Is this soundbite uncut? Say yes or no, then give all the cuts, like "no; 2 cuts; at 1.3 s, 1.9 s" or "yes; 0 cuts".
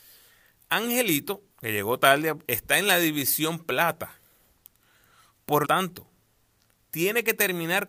no; 3 cuts; at 1.5 s, 2.4 s, 5.6 s